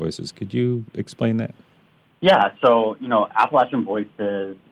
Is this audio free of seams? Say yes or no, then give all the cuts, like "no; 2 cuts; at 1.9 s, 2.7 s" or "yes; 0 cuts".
yes; 0 cuts